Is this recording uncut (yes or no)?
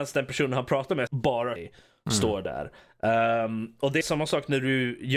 no